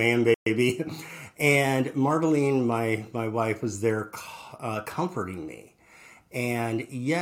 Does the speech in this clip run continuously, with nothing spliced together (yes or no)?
yes